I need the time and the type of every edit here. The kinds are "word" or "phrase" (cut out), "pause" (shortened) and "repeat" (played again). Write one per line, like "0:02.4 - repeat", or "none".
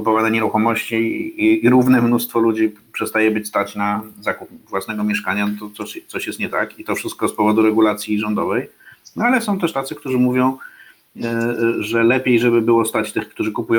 none